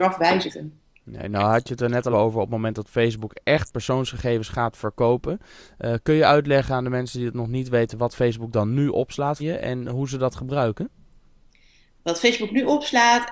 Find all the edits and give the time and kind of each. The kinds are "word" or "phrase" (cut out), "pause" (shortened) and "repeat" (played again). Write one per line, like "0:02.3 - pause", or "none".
0:02.1 - word
0:09.4 - word